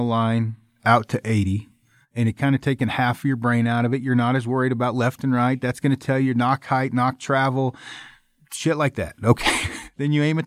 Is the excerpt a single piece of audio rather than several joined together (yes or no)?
yes